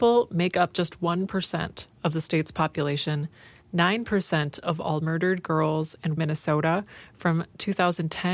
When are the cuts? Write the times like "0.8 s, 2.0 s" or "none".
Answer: 6.2 s